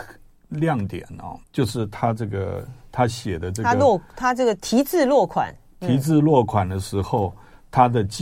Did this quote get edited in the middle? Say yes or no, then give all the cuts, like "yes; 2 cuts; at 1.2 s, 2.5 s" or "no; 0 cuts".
yes; 1 cut; at 1.4 s